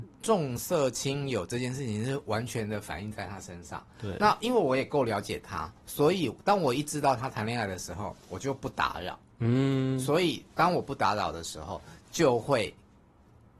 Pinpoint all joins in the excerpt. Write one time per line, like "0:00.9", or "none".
0:05.8
0:08.2